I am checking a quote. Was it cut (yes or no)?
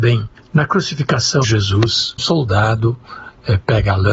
yes